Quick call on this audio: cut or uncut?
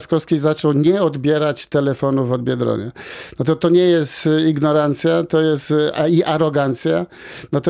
uncut